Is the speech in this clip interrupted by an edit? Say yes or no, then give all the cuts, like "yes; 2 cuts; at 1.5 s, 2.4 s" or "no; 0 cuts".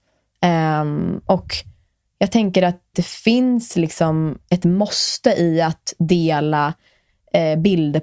yes; 1 cut; at 2.9 s